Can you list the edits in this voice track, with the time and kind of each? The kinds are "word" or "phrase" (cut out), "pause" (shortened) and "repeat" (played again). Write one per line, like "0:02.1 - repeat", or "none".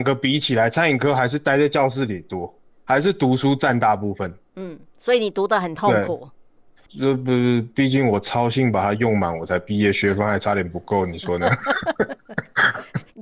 none

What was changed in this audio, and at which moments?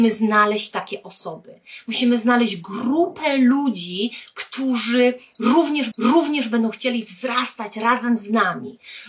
0:05.9 - repeat

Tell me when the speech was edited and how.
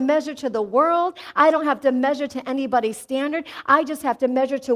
none

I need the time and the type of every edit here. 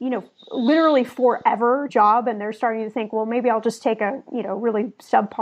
0:01.9 - phrase

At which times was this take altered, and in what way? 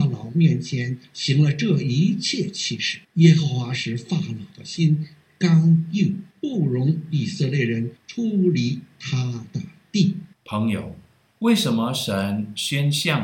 0:03.0 - pause
0:06.3 - pause
0:08.0 - pause
0:10.3 - pause

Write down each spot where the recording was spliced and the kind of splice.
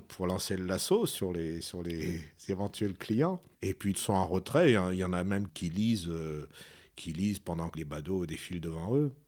0:03.9 - word
0:07.7 - word

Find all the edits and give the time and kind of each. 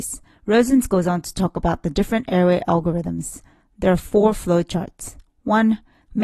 none

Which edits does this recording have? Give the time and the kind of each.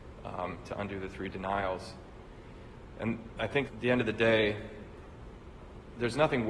0:03.7 - word

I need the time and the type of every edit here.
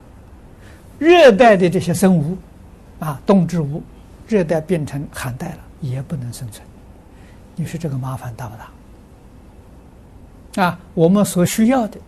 0:05.8 - phrase

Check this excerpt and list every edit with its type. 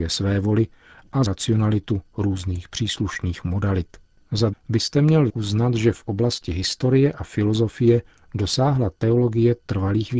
0:01.2 - word
0:04.5 - word
0:05.3 - word

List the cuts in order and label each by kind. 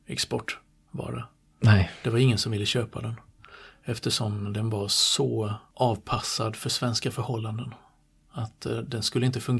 none

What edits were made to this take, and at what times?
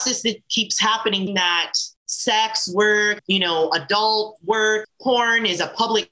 0:01.3 - word
0:02.0 - pause
0:03.2 - word
0:04.8 - word

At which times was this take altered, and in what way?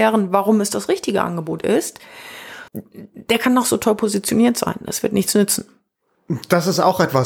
0:02.7 - pause

